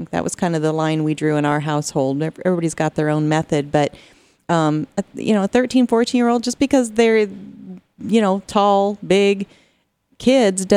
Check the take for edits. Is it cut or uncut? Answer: uncut